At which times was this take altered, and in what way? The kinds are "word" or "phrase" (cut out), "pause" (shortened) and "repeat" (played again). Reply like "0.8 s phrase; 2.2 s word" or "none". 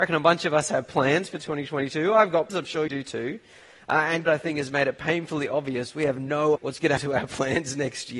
2.5 s word; 2.9 s word; 4.3 s word; 6.6 s word; 7.0 s word